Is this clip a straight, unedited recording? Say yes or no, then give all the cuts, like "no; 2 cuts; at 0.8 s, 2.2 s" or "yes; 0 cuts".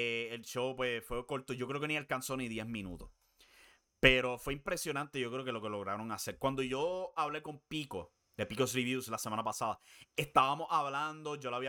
yes; 0 cuts